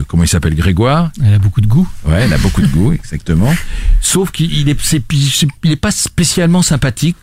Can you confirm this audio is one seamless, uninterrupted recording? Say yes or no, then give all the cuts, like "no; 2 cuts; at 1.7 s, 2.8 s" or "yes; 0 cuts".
yes; 0 cuts